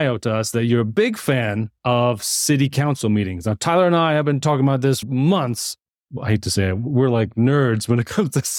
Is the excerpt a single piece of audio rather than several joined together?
no; 2 cuts; at 1.8 s, 5.0 s

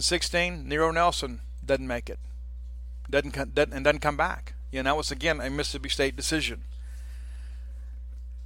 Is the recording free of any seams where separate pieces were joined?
yes; 0 cuts

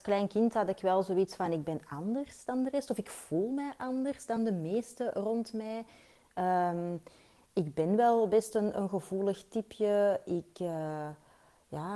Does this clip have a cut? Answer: no; 0 cuts

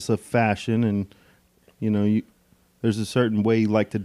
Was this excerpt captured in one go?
yes; 0 cuts

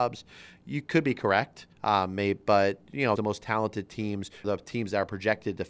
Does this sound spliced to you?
yes; 3 cuts; at 1.7 s, 3.2 s, 4.4 s

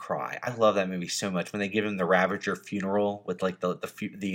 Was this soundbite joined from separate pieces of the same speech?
no; 0 cuts

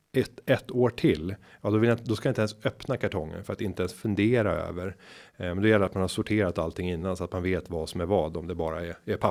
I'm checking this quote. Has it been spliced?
no; 0 cuts

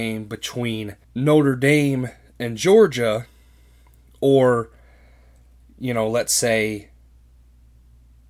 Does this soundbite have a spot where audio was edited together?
yes; 1 cut; at 1.0 s

